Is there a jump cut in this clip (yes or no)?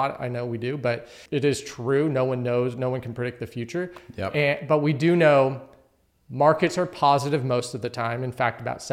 no